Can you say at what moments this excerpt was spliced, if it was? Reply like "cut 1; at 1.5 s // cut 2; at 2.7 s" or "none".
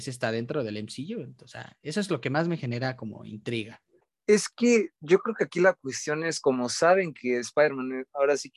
none